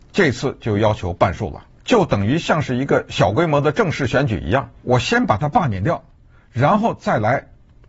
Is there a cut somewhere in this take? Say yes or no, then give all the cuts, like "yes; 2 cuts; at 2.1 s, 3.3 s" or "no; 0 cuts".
yes; 2 cuts; at 1.7 s, 4.8 s